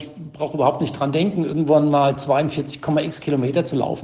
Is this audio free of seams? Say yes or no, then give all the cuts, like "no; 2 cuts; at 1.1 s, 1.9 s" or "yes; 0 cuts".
yes; 0 cuts